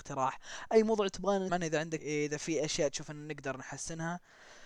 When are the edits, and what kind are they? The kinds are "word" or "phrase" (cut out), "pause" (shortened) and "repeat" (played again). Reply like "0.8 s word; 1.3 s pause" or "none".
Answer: 1.5 s word; 2.0 s word